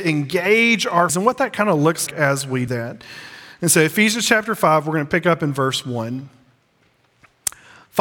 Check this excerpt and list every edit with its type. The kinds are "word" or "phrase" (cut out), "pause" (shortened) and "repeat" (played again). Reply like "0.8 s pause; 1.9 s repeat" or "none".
1.1 s word; 2.1 s word; 2.7 s word